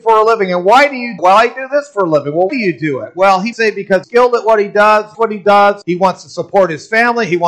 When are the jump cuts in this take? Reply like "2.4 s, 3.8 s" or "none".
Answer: 1.2 s, 2.5 s, 3.5 s, 4.0 s, 5.1 s, 5.8 s

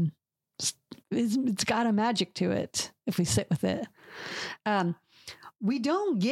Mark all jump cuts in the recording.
1.0 s

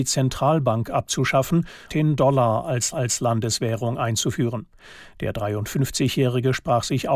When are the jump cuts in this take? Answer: 1.9 s, 2.9 s

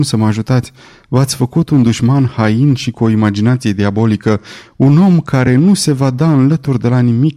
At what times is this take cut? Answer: none

